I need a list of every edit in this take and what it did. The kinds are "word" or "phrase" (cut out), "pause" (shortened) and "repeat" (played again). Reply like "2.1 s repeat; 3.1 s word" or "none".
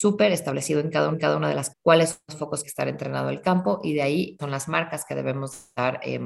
1.1 s repeat; 1.7 s word; 2.6 s phrase; 4.4 s word